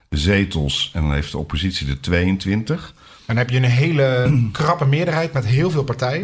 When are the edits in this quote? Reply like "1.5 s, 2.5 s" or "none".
none